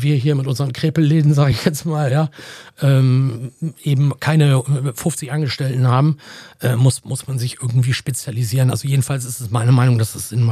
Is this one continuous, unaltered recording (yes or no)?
yes